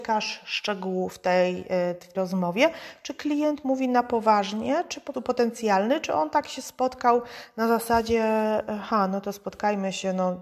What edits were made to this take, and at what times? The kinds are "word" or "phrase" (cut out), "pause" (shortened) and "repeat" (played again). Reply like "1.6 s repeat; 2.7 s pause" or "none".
2.1 s word; 5.1 s word